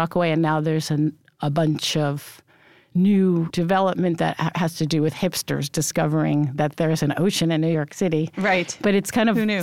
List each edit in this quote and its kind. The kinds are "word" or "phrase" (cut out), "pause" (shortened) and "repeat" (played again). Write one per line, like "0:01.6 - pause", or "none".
none